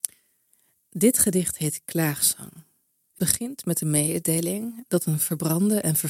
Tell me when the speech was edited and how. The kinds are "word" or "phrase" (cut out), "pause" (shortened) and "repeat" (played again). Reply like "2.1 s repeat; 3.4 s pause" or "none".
3.2 s word